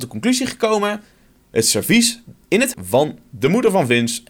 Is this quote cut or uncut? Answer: cut